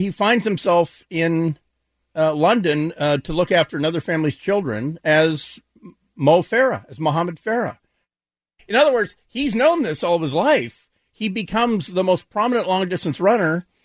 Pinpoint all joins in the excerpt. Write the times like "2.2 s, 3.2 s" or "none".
none